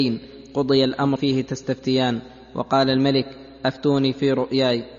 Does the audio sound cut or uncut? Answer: cut